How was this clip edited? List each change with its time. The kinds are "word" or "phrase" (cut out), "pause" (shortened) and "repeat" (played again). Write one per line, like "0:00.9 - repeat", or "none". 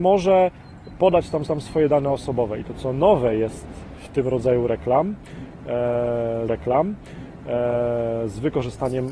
0:01.5 - repeat
0:02.6 - phrase
0:06.5 - repeat